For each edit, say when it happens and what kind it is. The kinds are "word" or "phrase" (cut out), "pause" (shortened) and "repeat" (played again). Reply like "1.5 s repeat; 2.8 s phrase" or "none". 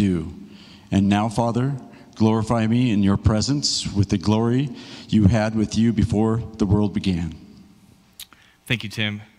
none